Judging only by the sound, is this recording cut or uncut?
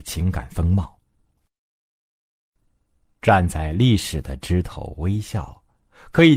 uncut